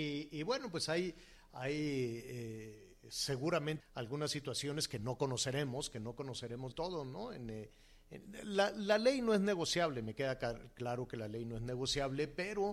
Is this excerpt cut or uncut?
cut